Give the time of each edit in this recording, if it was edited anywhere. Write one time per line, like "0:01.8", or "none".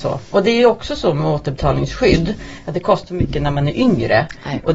0:03.1